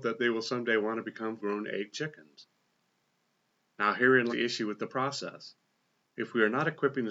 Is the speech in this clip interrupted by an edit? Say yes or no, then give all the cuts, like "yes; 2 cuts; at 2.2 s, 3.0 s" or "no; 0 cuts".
yes; 3 cuts; at 1.4 s, 1.9 s, 4.3 s